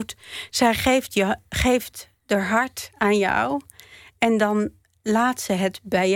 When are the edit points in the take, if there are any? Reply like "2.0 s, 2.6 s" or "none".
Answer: none

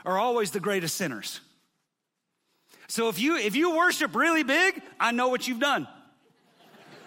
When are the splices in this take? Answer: none

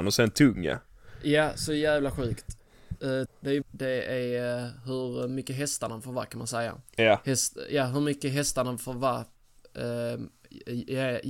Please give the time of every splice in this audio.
3.3 s, 3.6 s, 6.9 s

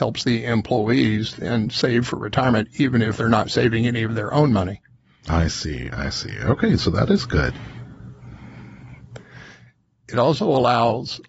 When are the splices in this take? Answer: none

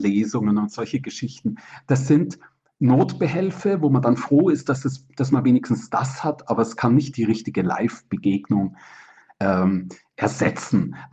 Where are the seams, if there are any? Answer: none

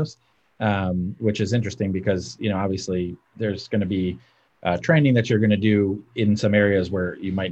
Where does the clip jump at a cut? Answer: none

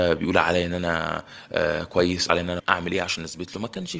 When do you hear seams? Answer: 2.3 s, 2.6 s

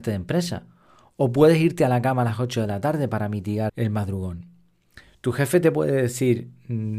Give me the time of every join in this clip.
3.7 s

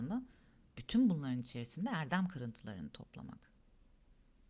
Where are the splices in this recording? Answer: none

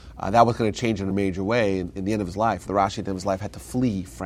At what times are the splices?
1.1 s, 2.7 s

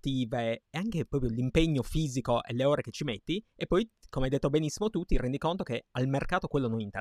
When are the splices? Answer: 3.5 s

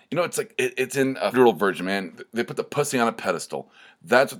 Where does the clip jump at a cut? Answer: 1.3 s

